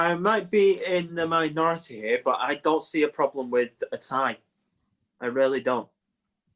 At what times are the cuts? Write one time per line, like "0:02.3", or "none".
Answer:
none